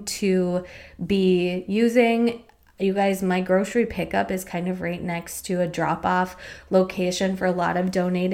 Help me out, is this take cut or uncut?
uncut